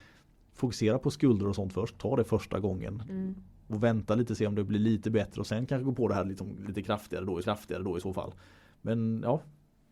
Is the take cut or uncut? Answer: cut